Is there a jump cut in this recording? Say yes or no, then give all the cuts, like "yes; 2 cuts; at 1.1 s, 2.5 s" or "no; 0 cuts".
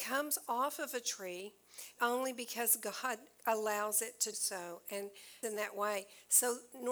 yes; 3 cuts; at 2.0 s, 4.3 s, 5.4 s